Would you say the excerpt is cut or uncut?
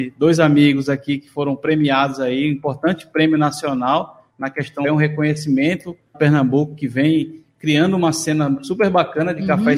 cut